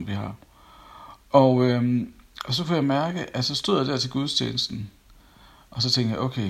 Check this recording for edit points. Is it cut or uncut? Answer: uncut